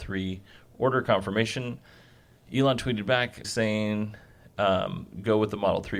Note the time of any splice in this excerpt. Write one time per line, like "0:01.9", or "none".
0:03.4

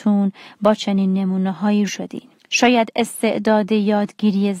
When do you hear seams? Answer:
0:01.9
0:02.4

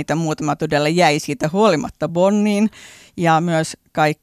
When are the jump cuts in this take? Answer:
none

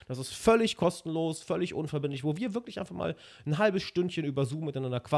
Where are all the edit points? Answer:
none

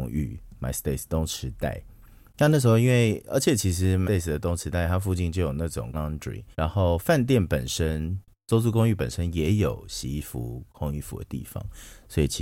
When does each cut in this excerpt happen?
0:04.0
0:05.9
0:06.5

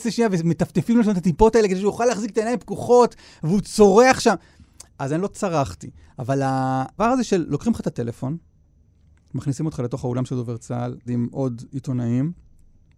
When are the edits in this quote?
0:07.0
0:11.1

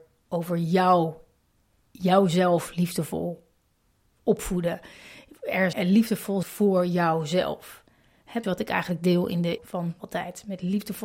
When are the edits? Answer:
0:05.7
0:06.4
0:08.4
0:09.6
0:10.0

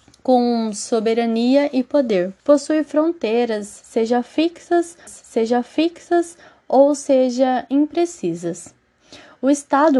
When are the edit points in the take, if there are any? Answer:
0:02.4
0:05.1

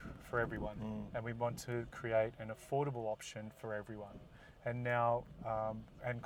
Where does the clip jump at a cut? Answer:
none

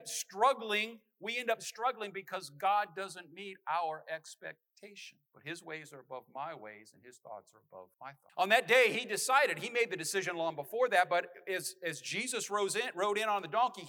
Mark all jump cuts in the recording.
0:05.3
0:07.9
0:08.3

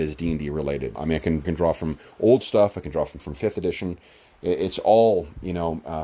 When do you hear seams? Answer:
0:01.0
0:01.4
0:02.4
0:03.2

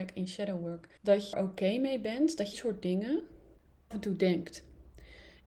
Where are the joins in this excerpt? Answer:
0:01.0
0:01.3
0:02.5
0:03.9

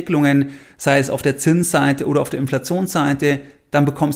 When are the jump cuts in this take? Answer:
none

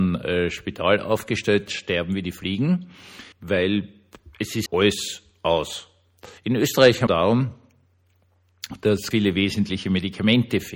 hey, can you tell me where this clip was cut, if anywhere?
0:01.7
0:03.3
0:04.7
0:06.4
0:07.1
0:09.1

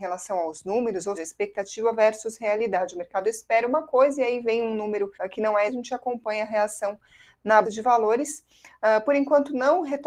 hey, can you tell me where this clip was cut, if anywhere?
0:01.1
0:05.1
0:05.7
0:07.6

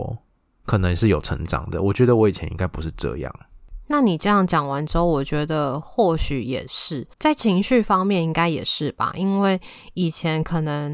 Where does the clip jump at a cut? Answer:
0:07.1

